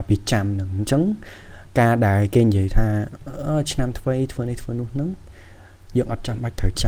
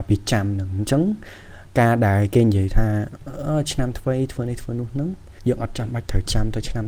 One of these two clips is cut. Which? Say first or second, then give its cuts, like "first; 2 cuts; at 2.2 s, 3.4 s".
second; 1 cut; at 5.4 s